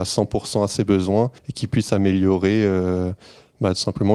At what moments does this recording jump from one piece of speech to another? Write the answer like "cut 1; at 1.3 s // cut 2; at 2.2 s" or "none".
cut 1; at 1.4 s

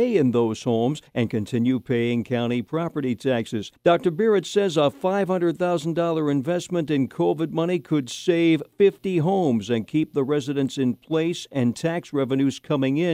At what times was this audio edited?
cut 1; at 1.1 s // cut 2; at 3.8 s // cut 3; at 8.7 s

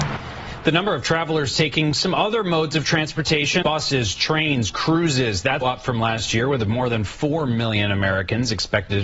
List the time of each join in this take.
cut 1; at 3.6 s // cut 2; at 5.6 s

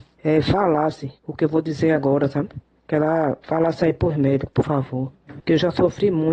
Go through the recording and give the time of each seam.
cut 1; at 1.2 s // cut 2; at 3.4 s

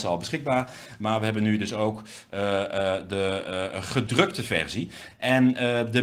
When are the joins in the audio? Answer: none

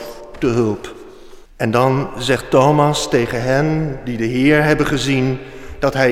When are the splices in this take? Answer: cut 1; at 1.5 s

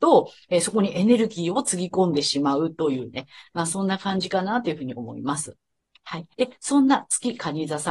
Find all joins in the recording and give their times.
cut 1; at 6.3 s

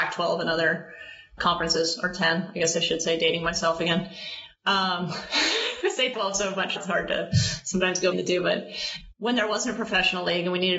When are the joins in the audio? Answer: cut 1; at 1.4 s // cut 2; at 6.1 s // cut 3; at 6.8 s // cut 4; at 8.1 s // cut 5; at 9.1 s

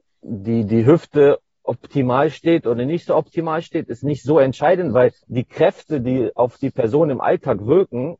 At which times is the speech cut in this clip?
cut 1; at 5.2 s

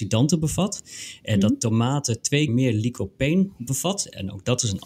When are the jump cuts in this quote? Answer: cut 1; at 2.5 s

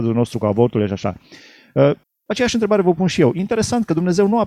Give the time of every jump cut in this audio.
cut 1; at 2.0 s

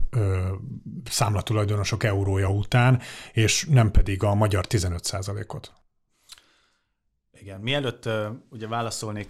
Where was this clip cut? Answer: none

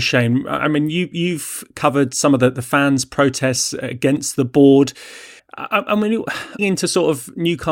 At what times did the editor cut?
cut 1; at 5.4 s // cut 2; at 6.6 s

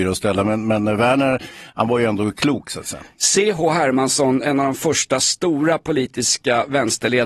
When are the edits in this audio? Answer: none

